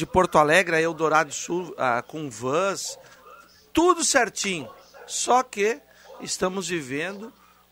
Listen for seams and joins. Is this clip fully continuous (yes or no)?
yes